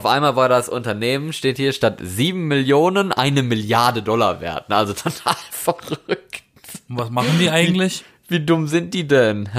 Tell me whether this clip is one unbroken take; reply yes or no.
yes